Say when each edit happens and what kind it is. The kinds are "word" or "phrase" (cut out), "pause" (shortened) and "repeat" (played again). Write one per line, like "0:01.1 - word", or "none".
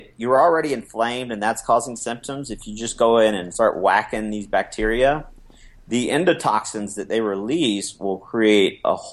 none